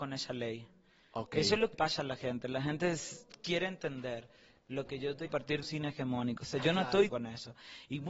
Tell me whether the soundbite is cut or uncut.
cut